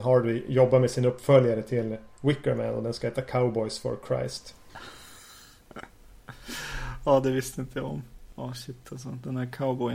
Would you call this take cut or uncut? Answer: uncut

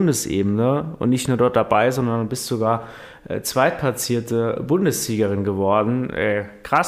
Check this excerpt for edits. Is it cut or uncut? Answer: uncut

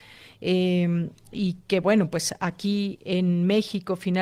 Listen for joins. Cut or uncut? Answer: uncut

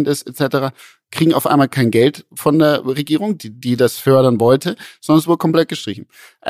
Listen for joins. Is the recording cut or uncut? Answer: uncut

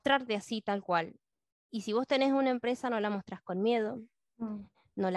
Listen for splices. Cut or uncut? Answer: uncut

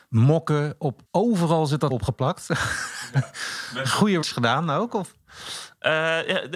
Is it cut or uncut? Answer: cut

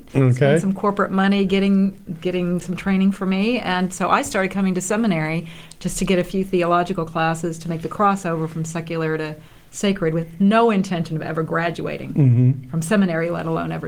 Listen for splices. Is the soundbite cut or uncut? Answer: uncut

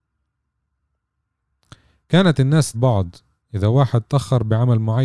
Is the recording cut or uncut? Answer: cut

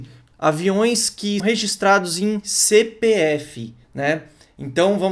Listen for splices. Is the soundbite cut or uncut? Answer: cut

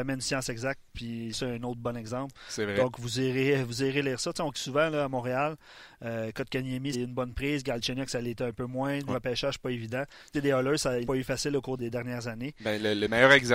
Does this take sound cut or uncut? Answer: cut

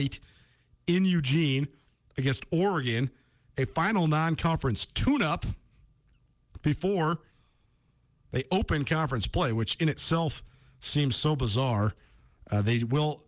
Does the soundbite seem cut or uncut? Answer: uncut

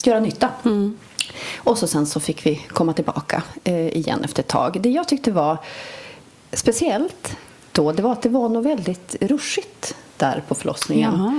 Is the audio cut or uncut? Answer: uncut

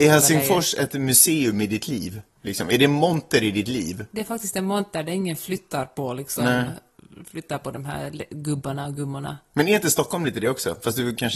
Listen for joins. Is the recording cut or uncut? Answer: uncut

